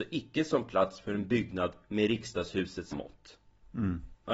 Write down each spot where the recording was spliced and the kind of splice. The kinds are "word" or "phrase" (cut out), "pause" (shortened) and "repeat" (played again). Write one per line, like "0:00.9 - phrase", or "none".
0:02.9 - word

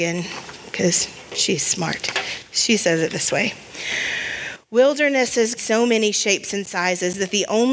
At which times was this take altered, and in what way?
0:05.6 - phrase

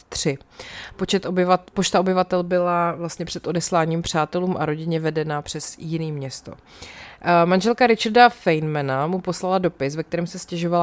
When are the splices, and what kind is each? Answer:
none

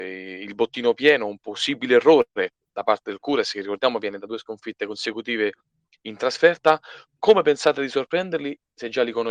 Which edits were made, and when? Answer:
none

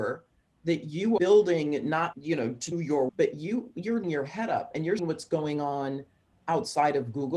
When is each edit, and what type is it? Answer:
0:01.2 - word
0:02.1 - word
0:02.7 - word
0:03.1 - word
0:04.0 - word
0:05.0 - word

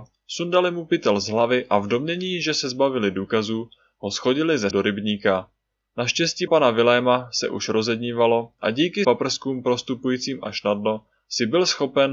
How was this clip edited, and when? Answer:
0:04.7 - word
0:06.5 - word
0:09.0 - word

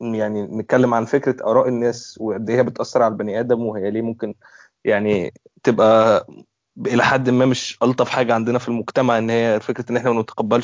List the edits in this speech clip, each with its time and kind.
none

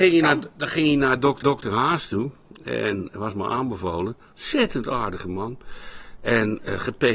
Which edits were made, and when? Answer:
0:01.4 - repeat

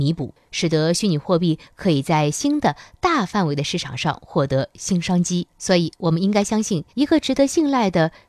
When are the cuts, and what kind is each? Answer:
0:05.5 - pause
0:06.9 - pause

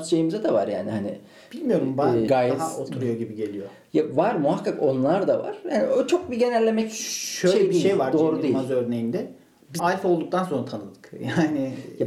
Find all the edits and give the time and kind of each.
0:02.3 - word
0:09.8 - word

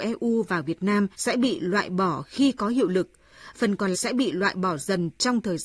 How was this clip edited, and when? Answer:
0:01.1 - pause
0:03.5 - word
0:03.9 - word

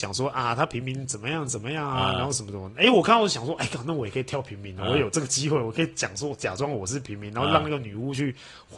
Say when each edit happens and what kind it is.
none

